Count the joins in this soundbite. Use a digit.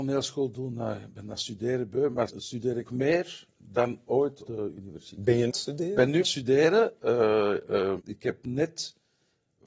6